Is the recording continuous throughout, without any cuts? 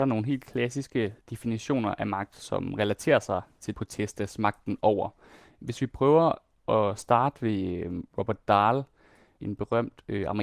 yes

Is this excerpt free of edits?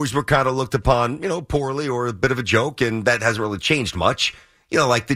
yes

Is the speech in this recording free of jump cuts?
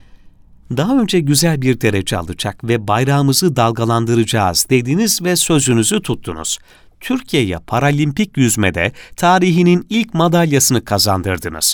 yes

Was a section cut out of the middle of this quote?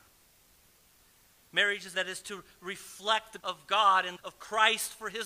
yes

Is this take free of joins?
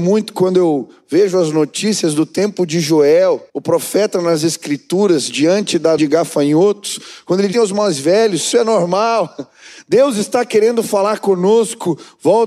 no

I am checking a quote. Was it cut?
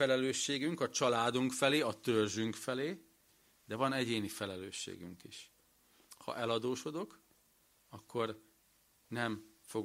no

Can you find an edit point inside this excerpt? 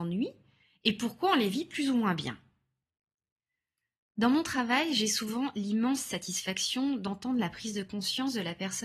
no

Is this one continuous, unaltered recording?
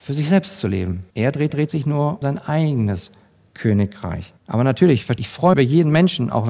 no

